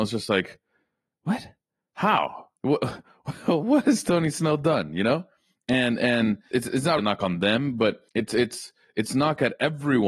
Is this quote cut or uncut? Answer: cut